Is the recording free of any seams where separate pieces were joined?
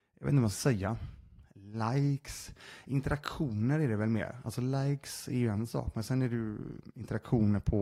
yes; 0 cuts

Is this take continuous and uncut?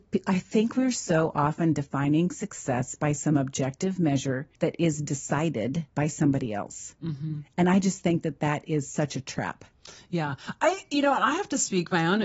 no; 2 cuts; at 4.6 s, 5.9 s

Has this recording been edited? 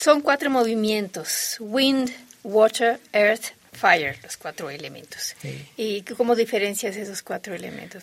no; 0 cuts

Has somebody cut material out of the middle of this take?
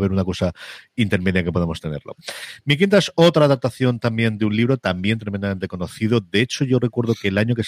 no; 0 cuts

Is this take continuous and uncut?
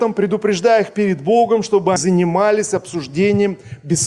no; 1 cut; at 2.0 s

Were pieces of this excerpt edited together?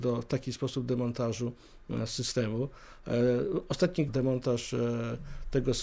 yes; 1 cut; at 4.1 s

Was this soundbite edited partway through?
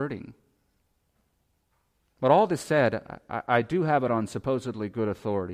no; 0 cuts

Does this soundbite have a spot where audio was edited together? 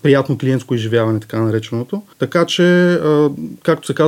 yes; 1 cut; at 2.1 s

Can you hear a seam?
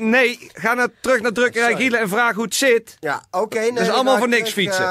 no; 0 cuts

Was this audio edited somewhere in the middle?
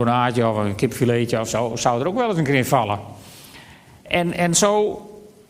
no; 0 cuts

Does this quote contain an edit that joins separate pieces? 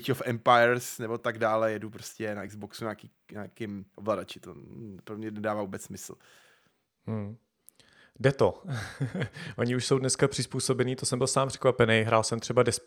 no; 0 cuts

